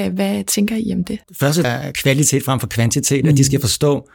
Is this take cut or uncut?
cut